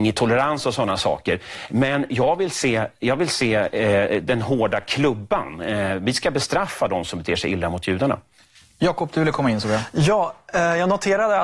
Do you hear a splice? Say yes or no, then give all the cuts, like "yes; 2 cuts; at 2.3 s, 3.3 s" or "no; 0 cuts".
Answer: no; 0 cuts